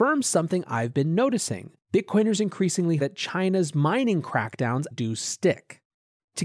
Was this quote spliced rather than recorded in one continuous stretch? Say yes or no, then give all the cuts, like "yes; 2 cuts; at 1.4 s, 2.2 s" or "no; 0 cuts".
yes; 3 cuts; at 1.8 s, 3.0 s, 4.9 s